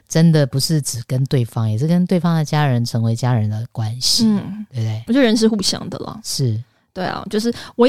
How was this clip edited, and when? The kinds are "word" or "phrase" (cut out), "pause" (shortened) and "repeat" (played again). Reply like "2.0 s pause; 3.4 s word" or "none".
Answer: none

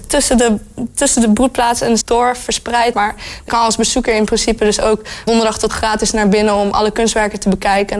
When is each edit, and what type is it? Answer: 2.0 s word; 2.9 s word; 3.5 s word; 5.3 s word; 5.7 s word

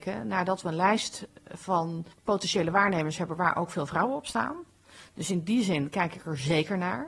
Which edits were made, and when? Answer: 2.1 s pause

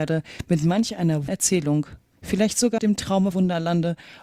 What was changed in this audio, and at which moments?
1.3 s word; 2.8 s word; 3.3 s word

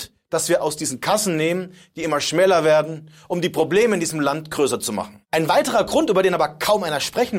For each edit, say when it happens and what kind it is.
5.2 s pause

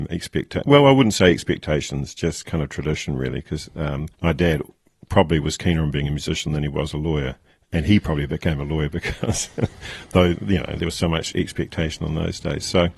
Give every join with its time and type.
4.1 s pause; 7.5 s pause

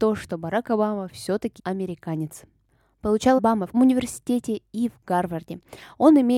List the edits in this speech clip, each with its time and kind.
1.6 s word; 3.4 s word; 3.7 s word

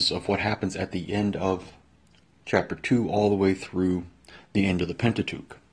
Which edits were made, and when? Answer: none

